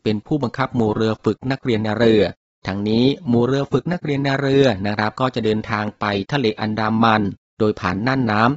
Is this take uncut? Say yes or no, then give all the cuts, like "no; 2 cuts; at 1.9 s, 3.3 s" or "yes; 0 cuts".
yes; 0 cuts